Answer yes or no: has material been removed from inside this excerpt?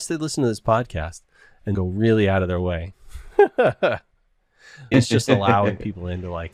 yes